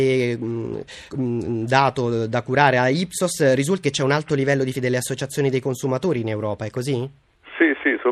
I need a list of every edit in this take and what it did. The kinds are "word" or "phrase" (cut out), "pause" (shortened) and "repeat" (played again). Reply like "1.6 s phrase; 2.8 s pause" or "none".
1.1 s word; 3.8 s word; 4.7 s phrase